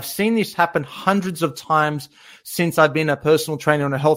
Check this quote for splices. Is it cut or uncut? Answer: uncut